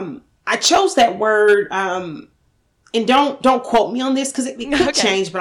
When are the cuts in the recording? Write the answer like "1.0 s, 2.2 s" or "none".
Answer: none